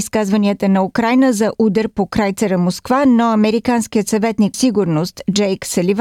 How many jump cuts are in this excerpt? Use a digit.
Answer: 1